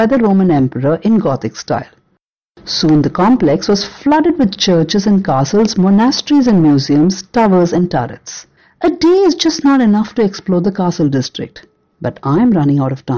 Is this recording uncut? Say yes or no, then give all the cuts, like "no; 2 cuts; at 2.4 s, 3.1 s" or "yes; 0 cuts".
yes; 0 cuts